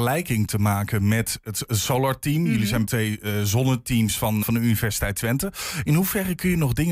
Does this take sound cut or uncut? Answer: cut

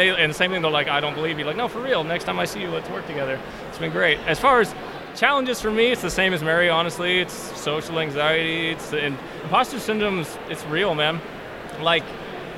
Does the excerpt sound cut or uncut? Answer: uncut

